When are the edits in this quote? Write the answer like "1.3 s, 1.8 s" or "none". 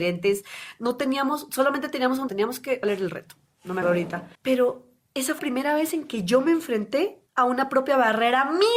2.3 s, 2.8 s, 3.8 s, 4.3 s, 5.4 s, 7.3 s